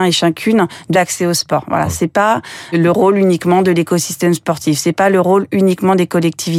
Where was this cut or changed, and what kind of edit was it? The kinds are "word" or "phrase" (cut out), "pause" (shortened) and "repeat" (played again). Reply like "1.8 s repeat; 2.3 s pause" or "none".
0.9 s word; 2.7 s word